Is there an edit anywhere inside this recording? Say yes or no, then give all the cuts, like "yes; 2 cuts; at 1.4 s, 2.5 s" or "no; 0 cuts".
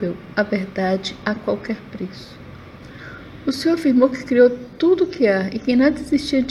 no; 0 cuts